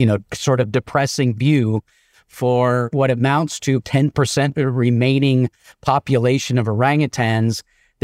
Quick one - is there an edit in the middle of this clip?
yes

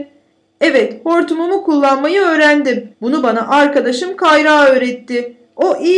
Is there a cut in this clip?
yes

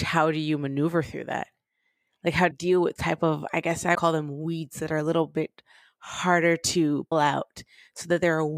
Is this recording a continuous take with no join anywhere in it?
no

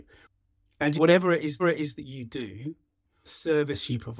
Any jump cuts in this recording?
yes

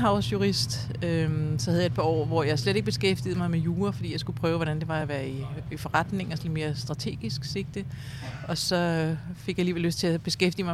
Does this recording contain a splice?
no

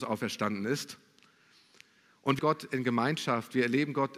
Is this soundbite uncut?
no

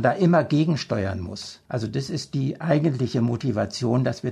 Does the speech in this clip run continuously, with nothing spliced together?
no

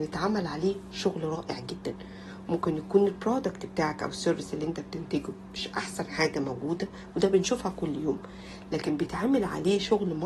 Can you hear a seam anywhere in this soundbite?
no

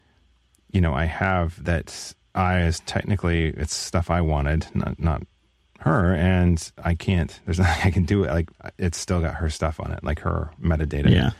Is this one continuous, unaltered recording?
yes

